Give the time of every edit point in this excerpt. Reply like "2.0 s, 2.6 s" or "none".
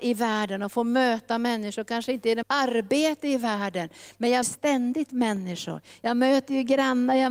2.4 s, 4.4 s

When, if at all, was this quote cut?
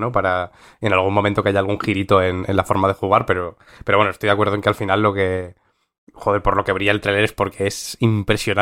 none

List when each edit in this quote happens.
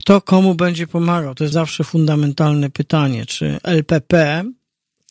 1.5 s

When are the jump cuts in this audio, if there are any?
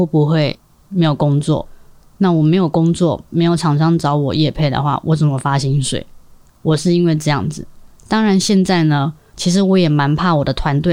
none

